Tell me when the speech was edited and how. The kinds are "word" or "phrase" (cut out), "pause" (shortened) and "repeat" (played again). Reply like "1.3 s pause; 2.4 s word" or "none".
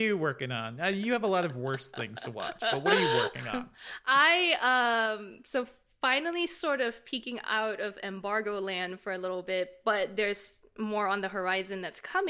none